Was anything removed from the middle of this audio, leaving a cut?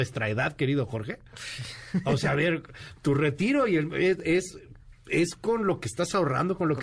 no; 0 cuts

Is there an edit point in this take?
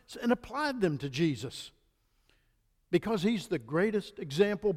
no; 0 cuts

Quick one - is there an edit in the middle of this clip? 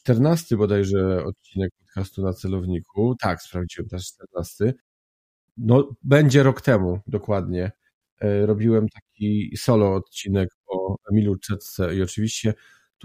no; 0 cuts

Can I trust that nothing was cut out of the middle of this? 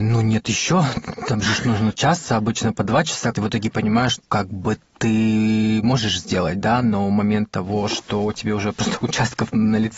no; 2 cuts; at 3.3 s, 4.2 s

